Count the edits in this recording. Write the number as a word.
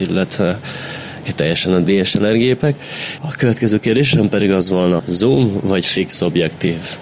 two